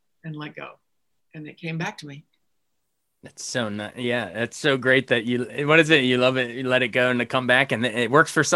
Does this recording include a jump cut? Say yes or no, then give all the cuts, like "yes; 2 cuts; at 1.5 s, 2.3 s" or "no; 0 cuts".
no; 0 cuts